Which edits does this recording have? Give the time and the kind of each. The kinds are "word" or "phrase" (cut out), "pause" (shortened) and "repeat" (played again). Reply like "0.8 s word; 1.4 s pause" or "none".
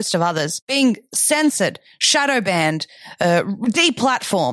none